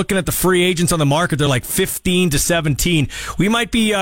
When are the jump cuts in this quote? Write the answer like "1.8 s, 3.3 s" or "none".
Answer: none